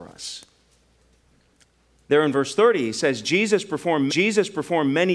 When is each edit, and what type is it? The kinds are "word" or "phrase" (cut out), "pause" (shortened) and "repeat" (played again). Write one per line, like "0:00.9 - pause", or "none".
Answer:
0:04.1 - repeat